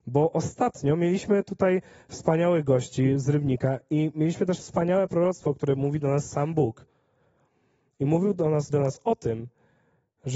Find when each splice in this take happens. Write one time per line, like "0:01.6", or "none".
0:08.7